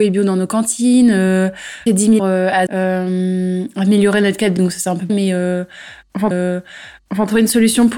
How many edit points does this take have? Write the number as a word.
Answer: six